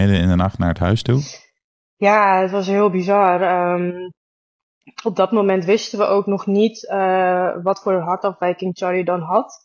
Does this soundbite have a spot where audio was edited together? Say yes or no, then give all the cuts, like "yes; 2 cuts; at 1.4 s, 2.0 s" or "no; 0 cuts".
no; 0 cuts